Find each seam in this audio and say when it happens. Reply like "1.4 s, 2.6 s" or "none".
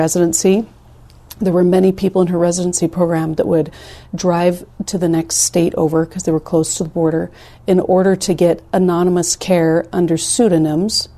none